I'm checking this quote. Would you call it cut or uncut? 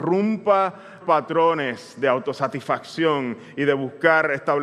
cut